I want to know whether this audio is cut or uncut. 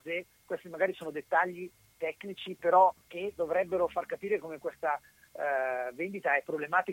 cut